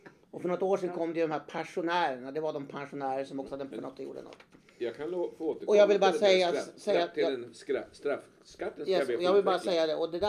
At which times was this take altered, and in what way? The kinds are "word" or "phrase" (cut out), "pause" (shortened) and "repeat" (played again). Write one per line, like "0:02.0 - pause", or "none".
0:03.7 - word